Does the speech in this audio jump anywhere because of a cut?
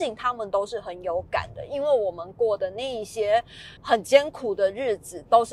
yes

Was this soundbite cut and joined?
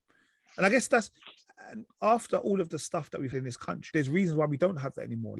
yes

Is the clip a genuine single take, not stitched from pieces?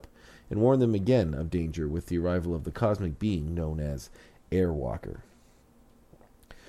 yes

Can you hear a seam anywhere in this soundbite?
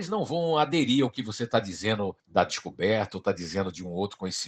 yes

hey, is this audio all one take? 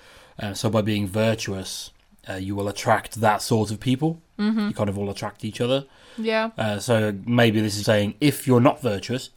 no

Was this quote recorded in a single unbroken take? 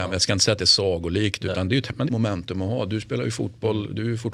no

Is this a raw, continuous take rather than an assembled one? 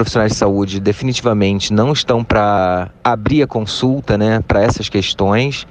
no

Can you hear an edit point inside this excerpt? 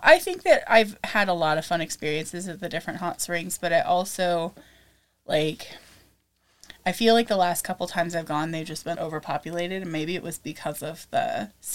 yes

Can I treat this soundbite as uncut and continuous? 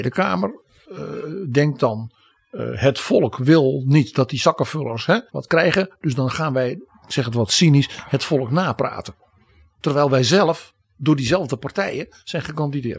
no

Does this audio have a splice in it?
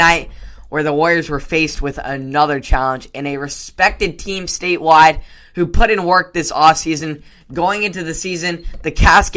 no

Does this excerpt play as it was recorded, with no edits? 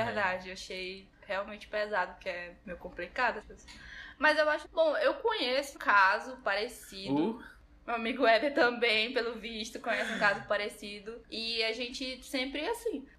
no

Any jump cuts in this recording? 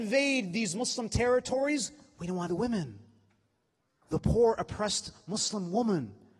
yes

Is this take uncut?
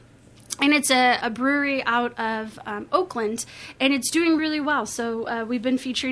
no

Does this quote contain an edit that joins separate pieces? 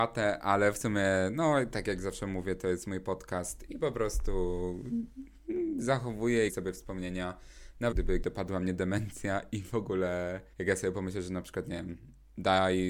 yes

